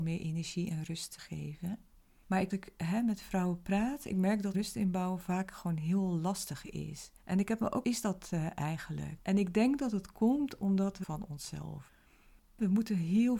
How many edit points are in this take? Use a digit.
6